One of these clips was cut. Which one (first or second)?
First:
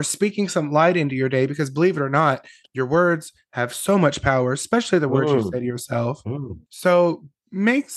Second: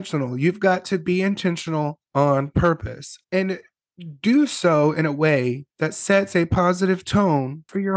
second